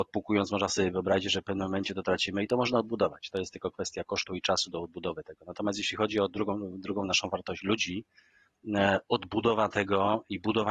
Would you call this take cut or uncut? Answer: uncut